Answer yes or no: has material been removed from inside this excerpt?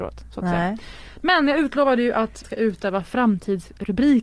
yes